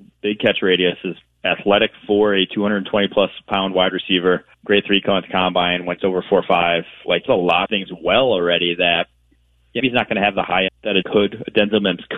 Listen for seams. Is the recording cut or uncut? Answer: cut